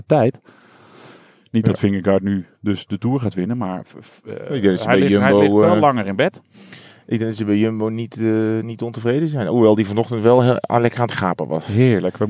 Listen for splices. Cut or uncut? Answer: uncut